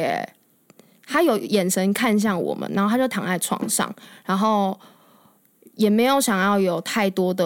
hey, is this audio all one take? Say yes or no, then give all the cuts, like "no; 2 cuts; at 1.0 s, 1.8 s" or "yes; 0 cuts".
yes; 0 cuts